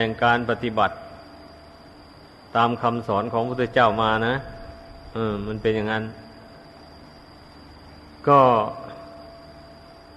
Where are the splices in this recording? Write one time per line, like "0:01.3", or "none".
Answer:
none